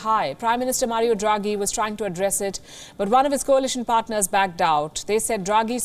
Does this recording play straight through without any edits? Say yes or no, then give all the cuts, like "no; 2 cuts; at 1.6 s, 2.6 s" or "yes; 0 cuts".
yes; 0 cuts